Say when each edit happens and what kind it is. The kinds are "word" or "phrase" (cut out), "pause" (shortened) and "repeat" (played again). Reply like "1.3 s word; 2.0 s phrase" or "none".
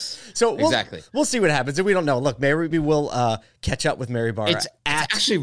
2.7 s word